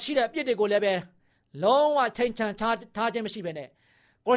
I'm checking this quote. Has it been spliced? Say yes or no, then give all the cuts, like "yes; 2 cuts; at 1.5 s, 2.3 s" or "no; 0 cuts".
no; 0 cuts